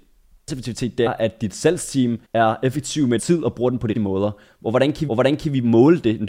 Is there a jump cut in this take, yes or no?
yes